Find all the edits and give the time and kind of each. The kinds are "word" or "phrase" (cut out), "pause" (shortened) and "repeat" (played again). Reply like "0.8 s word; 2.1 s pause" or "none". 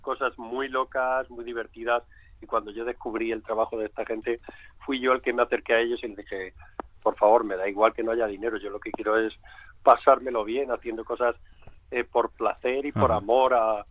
none

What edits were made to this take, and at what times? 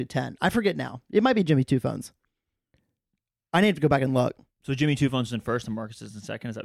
none

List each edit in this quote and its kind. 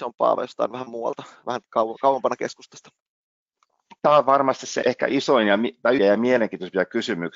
4.8 s word; 6.0 s word

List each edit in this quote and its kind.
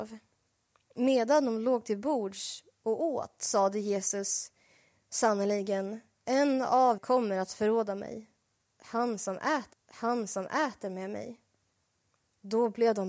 7.0 s word; 9.7 s repeat

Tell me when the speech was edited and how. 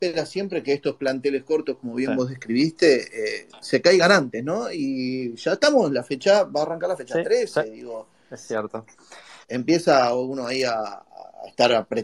9.4 s pause

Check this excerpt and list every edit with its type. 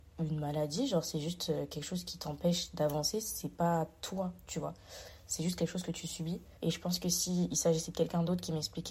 6.6 s pause

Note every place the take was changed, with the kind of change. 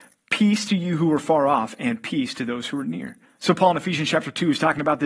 3.2 s pause

